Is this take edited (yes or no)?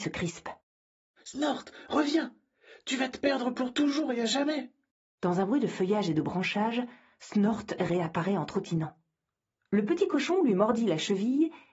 no